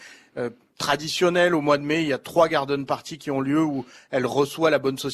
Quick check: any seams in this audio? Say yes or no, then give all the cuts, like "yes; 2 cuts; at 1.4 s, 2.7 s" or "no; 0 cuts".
no; 0 cuts